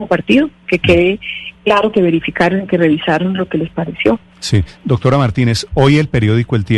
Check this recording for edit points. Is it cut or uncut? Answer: uncut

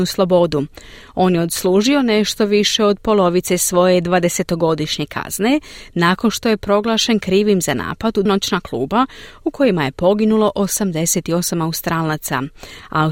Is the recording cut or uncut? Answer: cut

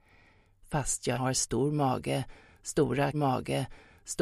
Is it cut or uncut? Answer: cut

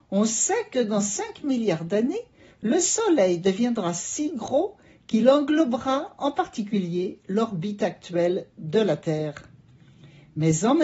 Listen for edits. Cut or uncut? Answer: uncut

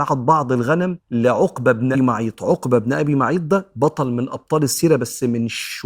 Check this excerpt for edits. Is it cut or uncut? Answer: cut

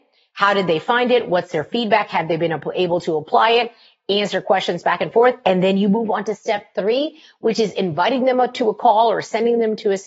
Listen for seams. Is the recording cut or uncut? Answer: uncut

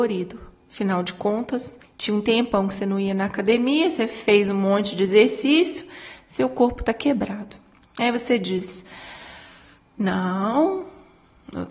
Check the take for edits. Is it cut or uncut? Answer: cut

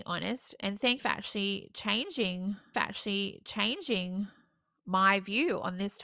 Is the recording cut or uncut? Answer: cut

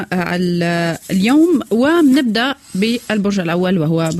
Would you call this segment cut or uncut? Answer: uncut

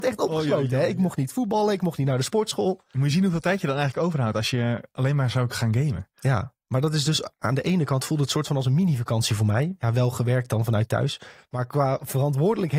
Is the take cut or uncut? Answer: uncut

